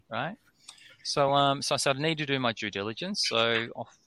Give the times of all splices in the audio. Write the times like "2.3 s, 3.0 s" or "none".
none